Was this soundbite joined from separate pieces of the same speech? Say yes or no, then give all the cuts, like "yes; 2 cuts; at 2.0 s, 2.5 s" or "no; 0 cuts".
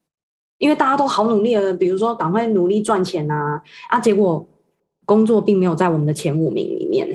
no; 0 cuts